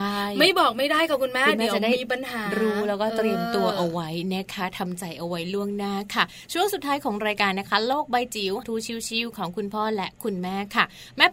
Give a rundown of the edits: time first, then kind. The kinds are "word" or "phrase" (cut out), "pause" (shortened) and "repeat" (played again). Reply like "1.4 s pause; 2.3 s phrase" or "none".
8.6 s word